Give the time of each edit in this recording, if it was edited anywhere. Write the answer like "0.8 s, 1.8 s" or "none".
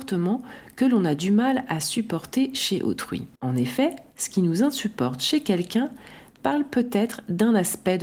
3.4 s